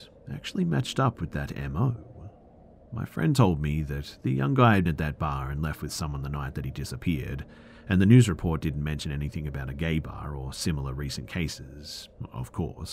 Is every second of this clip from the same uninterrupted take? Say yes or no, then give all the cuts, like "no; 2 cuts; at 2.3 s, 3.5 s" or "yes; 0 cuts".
no; 1 cut; at 4.9 s